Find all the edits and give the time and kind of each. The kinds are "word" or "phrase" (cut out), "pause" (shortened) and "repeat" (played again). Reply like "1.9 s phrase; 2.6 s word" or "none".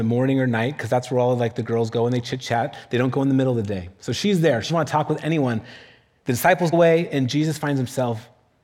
4.7 s word; 6.7 s word